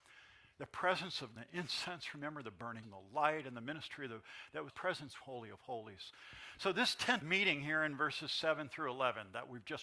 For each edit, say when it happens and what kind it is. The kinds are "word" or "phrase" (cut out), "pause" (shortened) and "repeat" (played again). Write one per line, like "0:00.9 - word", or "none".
0:01.4 - phrase
0:02.8 - word
0:04.7 - phrase
0:05.2 - phrase
0:07.2 - word